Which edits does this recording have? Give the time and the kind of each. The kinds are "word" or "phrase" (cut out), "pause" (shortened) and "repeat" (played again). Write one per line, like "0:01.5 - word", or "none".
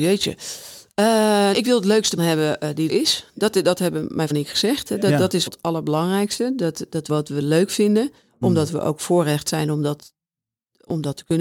0:01.5 - word
0:02.2 - word
0:02.9 - word
0:04.3 - word
0:05.5 - word
0:07.1 - word

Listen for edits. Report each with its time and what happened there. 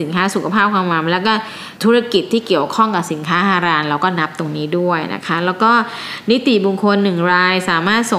0:01.8 - pause

